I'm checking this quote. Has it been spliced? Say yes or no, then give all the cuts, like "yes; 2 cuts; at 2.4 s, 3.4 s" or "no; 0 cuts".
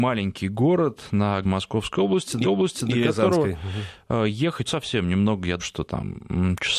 yes; 4 cuts; at 1.4 s, 2.4 s, 4.7 s, 5.6 s